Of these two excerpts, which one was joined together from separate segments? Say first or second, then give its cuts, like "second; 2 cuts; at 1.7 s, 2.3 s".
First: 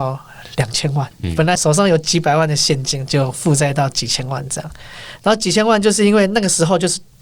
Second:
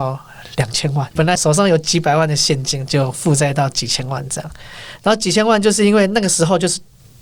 second; 1 cut; at 1.2 s